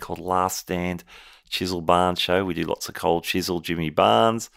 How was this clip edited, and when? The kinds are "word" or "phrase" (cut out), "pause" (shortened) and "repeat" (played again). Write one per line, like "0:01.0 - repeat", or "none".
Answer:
none